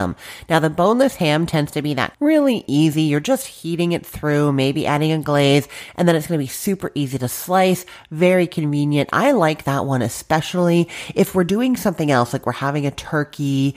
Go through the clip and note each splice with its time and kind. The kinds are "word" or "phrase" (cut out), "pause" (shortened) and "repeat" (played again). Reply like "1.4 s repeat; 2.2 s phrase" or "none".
2.1 s phrase